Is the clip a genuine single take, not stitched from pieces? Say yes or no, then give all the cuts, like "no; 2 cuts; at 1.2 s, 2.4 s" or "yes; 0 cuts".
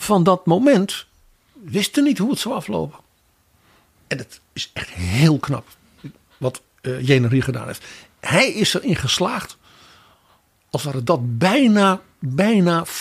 yes; 0 cuts